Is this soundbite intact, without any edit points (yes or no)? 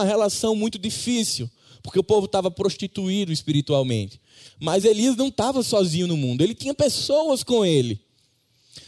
yes